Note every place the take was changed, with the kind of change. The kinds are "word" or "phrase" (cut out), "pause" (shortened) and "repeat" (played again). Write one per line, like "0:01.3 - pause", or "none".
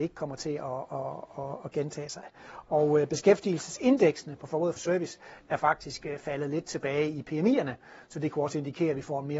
0:04.8 - phrase